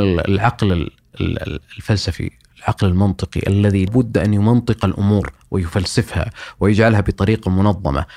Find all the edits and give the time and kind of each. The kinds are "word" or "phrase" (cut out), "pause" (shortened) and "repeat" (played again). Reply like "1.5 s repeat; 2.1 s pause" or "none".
3.9 s word